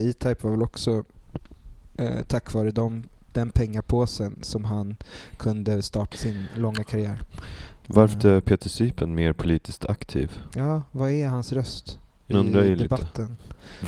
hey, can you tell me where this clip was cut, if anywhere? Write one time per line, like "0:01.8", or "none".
0:06.1
0:08.1
0:12.3